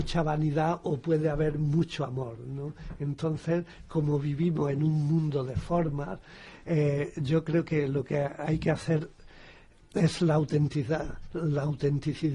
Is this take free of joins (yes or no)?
yes